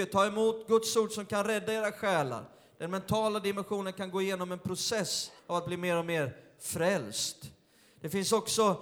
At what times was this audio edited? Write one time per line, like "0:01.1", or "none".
0:05.4